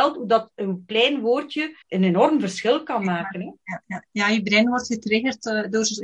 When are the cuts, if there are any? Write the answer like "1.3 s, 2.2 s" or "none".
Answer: 1.8 s

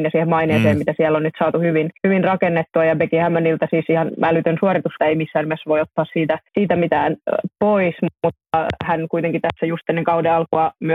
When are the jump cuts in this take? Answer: 2.0 s, 5.0 s, 6.5 s

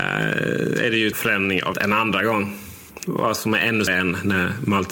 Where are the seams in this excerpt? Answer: 1.1 s, 1.7 s, 3.9 s

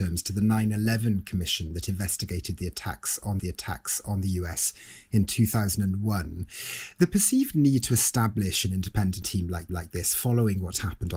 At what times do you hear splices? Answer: 3.4 s, 9.2 s, 9.7 s

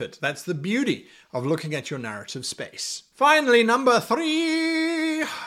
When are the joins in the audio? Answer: none

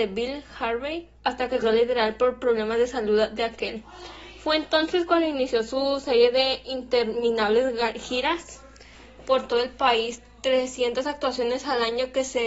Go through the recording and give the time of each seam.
1.1 s, 1.6 s

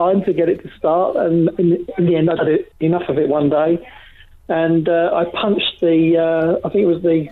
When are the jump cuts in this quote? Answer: 2.4 s

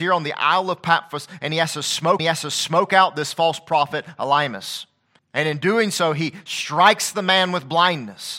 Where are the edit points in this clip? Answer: 2.2 s, 5.2 s

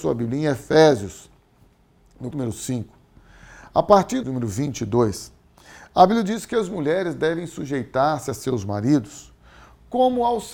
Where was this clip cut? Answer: 2.3 s, 4.2 s

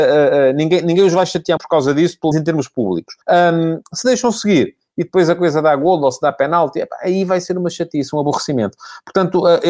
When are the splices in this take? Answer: 1.6 s, 2.3 s, 3.2 s

